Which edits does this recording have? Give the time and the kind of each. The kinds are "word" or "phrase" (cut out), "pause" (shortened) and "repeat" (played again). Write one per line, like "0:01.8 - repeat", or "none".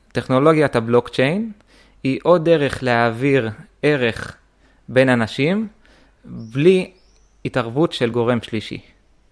none